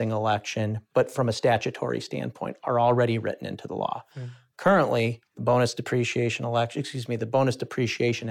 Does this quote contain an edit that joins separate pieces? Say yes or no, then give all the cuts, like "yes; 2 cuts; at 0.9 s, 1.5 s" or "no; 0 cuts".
yes; 1 cut; at 5.3 s